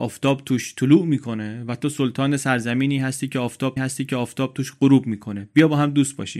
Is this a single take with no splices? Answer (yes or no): no